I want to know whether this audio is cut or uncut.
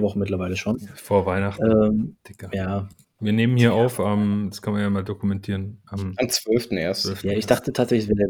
uncut